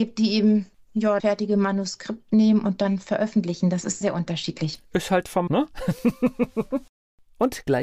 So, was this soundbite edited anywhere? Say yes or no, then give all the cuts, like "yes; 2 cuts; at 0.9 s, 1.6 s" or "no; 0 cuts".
yes; 3 cuts; at 1.2 s, 4.0 s, 5.5 s